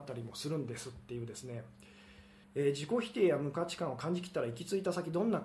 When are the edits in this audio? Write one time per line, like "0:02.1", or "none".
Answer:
0:02.4